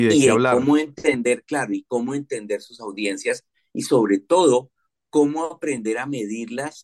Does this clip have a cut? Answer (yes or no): no